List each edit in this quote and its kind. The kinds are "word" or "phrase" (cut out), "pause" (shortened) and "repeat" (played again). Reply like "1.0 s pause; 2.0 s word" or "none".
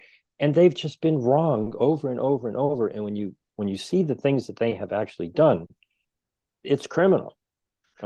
none